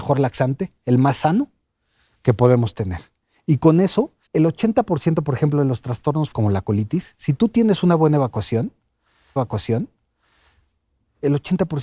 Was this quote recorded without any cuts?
no; 3 cuts; at 4.3 s, 6.3 s, 9.4 s

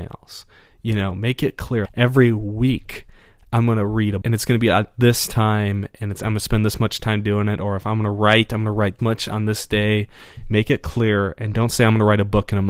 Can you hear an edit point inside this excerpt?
yes; 3 cuts; at 1.9 s, 4.2 s, 9.0 s

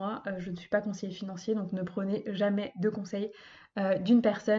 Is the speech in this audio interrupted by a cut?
no; 0 cuts

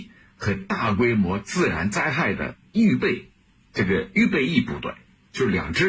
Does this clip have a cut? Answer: no; 0 cuts

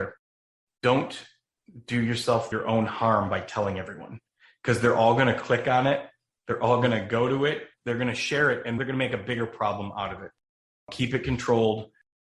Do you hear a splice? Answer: no; 0 cuts

